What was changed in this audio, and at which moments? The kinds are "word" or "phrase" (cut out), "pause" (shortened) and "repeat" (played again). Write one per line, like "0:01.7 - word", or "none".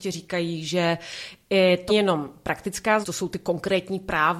0:01.9 - word
0:03.0 - word